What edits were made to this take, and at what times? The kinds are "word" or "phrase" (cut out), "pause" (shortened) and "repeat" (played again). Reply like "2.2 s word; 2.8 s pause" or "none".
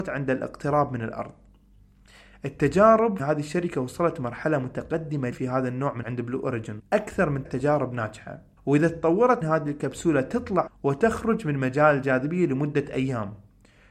3.2 s word; 5.3 s word; 6.0 s word; 6.8 s word; 7.5 s word; 8.6 s pause; 9.4 s phrase; 10.7 s word